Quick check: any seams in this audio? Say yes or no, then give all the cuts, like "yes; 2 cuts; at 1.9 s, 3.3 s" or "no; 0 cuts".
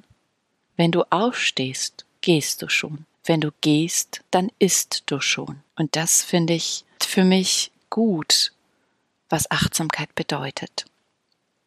yes; 4 cuts; at 3.1 s, 4.3 s, 5.7 s, 7.0 s